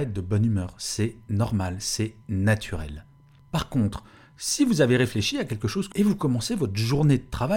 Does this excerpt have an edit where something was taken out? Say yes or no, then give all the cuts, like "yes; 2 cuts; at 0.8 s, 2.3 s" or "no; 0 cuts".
yes; 1 cut; at 5.9 s